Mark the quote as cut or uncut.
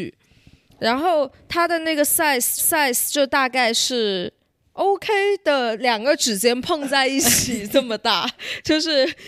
cut